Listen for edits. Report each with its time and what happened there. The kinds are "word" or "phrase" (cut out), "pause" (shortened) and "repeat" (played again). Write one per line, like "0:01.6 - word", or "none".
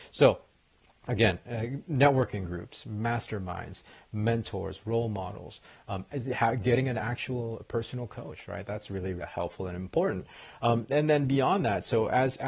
0:09.2 - word
0:10.9 - word